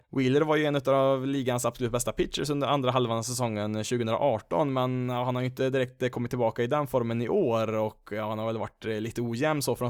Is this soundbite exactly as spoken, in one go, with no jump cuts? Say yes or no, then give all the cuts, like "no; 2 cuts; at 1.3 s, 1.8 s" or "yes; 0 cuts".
yes; 0 cuts